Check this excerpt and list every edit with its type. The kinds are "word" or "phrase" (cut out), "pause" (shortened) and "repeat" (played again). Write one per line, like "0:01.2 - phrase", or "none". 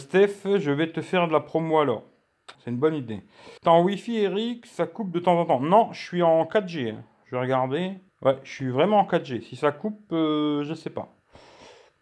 0:02.5 - pause
0:03.6 - pause
0:08.1 - pause